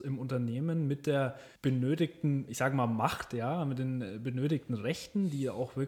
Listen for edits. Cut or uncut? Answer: cut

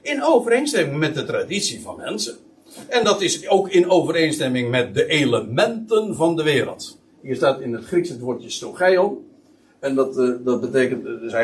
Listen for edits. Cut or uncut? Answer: uncut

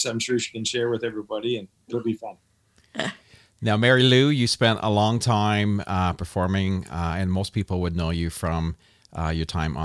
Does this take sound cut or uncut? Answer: uncut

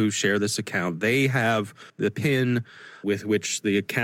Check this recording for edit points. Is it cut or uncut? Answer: cut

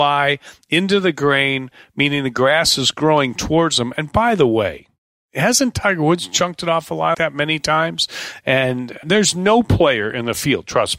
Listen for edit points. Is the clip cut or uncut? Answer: cut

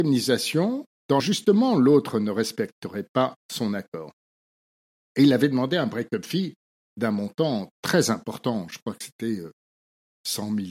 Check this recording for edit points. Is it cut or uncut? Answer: cut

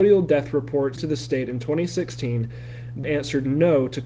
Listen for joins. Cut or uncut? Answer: cut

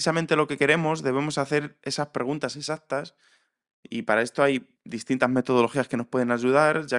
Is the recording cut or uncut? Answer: uncut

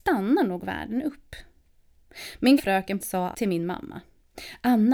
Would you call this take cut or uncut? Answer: cut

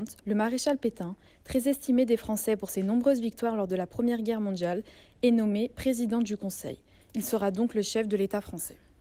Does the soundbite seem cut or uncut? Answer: uncut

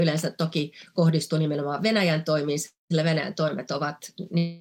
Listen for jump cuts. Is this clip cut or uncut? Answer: uncut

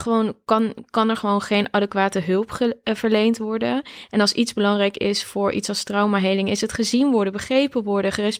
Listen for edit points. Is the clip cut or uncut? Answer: uncut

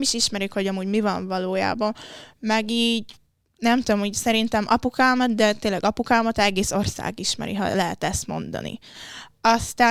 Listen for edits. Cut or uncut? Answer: uncut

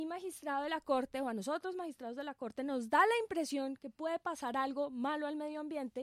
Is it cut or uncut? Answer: uncut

